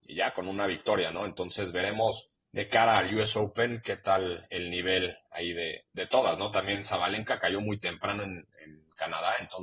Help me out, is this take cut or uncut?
cut